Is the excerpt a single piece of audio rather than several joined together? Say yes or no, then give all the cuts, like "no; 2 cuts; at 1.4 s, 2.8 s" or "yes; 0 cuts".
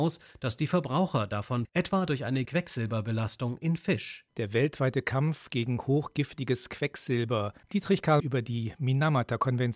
no; 5 cuts; at 1.6 s, 2.4 s, 4.3 s, 7.6 s, 8.2 s